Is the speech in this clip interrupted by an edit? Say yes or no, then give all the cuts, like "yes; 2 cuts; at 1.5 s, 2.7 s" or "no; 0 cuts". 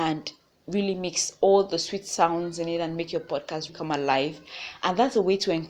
yes; 1 cut; at 3.7 s